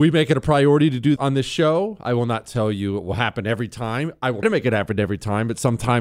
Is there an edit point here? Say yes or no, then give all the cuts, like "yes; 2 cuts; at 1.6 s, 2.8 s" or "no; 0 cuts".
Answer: yes; 2 cuts; at 1.2 s, 4.4 s